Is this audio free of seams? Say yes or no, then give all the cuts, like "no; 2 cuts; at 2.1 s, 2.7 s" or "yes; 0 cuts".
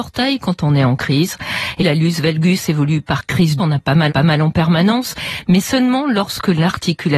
no; 3 cuts; at 1.8 s, 3.6 s, 4.1 s